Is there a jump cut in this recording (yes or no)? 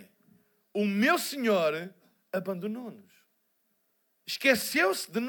no